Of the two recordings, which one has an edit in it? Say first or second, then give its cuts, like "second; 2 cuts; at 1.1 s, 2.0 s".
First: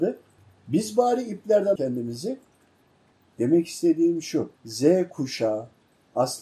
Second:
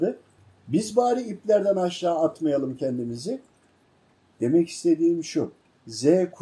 first; 2 cuts; at 1.8 s, 4.6 s